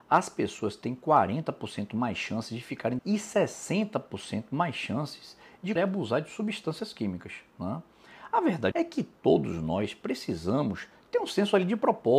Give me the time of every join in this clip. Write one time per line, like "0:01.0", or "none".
0:03.0
0:05.8
0:08.7